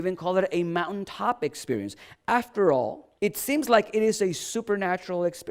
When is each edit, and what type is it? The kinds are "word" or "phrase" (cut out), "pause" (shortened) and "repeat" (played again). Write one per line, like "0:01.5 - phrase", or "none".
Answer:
0:03.2 - pause